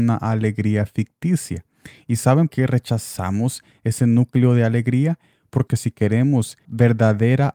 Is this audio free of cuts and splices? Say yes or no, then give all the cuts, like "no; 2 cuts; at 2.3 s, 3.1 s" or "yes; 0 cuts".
no; 3 cuts; at 2.5 s, 5.7 s, 6.6 s